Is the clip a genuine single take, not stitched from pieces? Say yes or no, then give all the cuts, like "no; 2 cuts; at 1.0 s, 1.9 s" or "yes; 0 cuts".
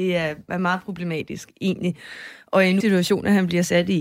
no; 1 cut; at 2.8 s